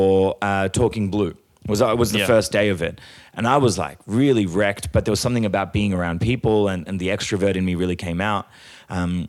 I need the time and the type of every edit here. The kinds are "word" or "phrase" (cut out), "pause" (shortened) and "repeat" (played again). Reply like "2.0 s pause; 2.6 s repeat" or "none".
none